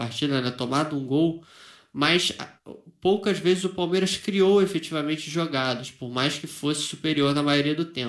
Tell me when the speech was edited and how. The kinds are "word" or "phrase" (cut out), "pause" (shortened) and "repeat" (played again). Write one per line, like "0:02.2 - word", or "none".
none